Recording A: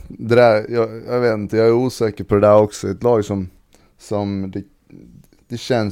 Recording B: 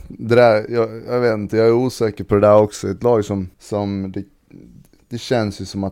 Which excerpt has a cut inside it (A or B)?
B